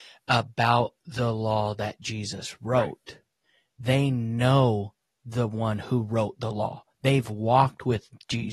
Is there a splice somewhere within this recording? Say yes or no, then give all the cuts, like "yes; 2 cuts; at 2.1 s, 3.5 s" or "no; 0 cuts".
no; 0 cuts